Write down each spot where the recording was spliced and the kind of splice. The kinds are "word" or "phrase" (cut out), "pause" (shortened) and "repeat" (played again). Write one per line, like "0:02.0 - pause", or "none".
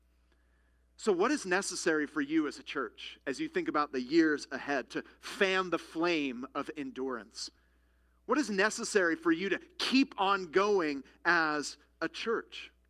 none